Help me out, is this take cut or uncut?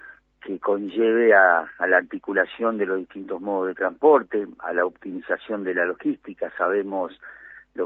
uncut